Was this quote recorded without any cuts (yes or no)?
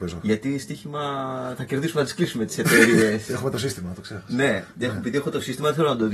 yes